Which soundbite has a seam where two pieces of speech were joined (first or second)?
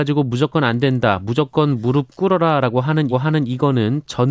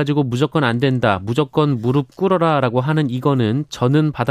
first